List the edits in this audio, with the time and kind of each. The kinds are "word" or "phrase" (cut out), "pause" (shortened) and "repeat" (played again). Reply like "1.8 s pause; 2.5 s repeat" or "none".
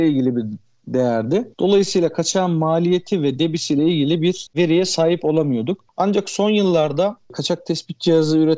none